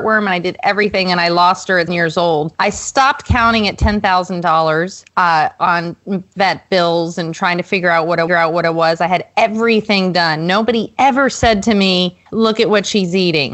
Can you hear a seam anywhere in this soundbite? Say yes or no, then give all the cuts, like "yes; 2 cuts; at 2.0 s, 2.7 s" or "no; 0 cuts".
yes; 5 cuts; at 1.9 s, 2.6 s, 5.1 s, 8.3 s, 12.3 s